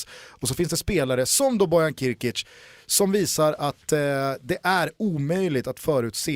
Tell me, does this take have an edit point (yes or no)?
no